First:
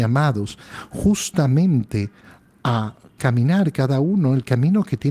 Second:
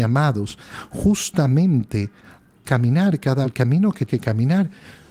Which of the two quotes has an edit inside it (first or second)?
second